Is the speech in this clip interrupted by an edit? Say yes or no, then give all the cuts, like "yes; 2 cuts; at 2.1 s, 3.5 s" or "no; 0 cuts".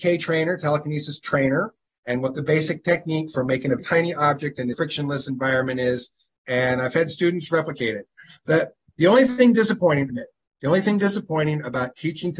yes; 3 cuts; at 3.8 s, 4.7 s, 10.1 s